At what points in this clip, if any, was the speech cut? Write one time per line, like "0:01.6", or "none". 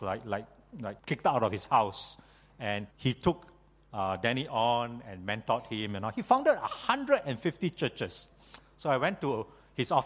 0:01.0
0:02.9